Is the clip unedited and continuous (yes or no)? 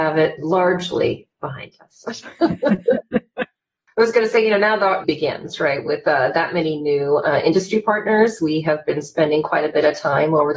no